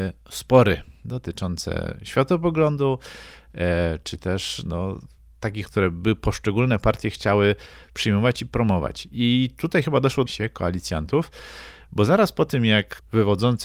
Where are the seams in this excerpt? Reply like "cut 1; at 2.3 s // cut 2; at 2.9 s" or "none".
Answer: cut 1; at 5.7 s // cut 2; at 10.3 s